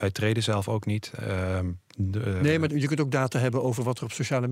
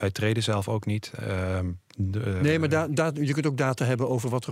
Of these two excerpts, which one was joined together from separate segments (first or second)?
first